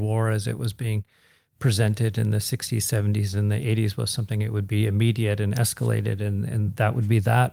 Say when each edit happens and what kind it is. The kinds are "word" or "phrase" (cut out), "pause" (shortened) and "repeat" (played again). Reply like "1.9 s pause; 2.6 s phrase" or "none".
none